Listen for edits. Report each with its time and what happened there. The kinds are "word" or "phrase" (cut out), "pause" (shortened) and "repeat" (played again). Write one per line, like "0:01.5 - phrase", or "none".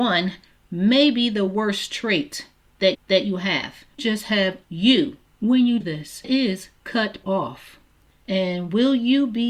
0:02.9 - repeat
0:04.0 - phrase
0:04.6 - word
0:05.8 - word
0:06.2 - phrase
0:07.2 - word

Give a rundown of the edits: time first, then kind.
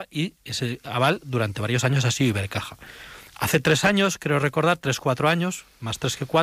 0:03.3 - pause

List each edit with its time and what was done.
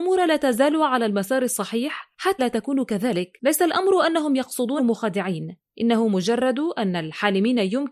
0:02.4 - word
0:04.8 - phrase

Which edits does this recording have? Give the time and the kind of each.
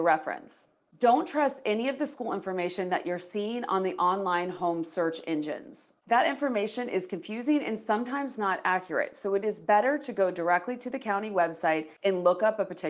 none

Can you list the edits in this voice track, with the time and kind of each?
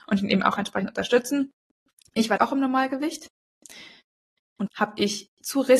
0:02.4 - word
0:04.7 - word

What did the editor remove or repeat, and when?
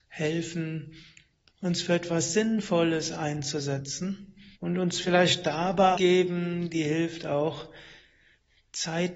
0:04.5 - pause
0:06.0 - phrase

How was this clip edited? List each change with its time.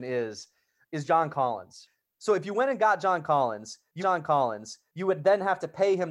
0:04.0 - repeat

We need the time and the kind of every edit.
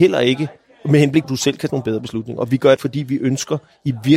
0:01.2 - word
0:01.7 - word
0:02.8 - phrase

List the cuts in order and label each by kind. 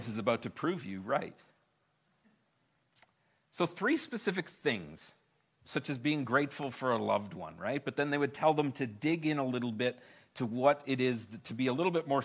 none

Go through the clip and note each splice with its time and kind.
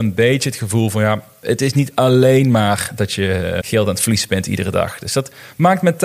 0:03.6 - word

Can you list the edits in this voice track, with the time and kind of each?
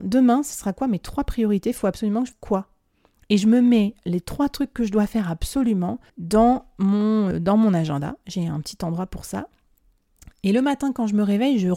0:02.3 - word
0:06.1 - pause
0:07.3 - word

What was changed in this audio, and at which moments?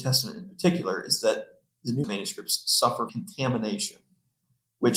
0:02.0 - word
0:03.1 - word

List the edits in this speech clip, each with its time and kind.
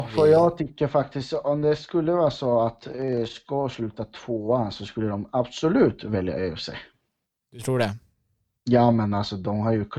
none

